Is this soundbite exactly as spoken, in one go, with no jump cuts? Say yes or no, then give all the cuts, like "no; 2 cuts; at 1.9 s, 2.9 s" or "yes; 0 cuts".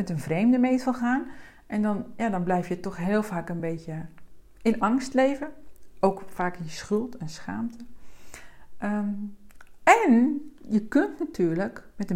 yes; 0 cuts